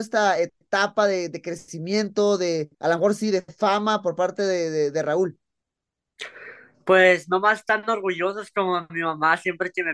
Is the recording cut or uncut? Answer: cut